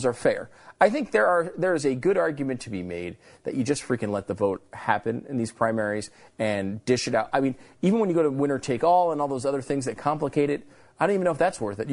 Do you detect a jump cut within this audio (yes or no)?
no